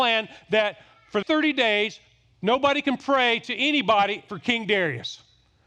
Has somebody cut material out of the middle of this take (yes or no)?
yes